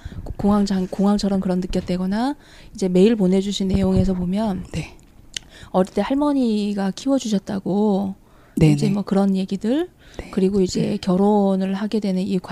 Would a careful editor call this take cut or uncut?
uncut